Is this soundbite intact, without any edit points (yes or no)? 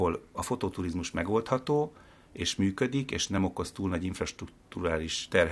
yes